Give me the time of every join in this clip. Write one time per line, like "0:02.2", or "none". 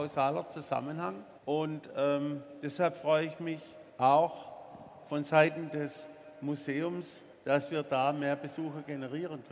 0:01.4
0:03.9
0:07.3